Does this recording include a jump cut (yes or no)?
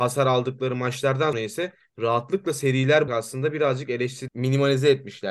yes